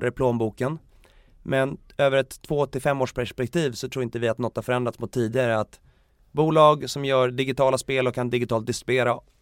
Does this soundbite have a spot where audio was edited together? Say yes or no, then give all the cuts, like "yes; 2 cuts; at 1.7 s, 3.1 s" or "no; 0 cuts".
no; 0 cuts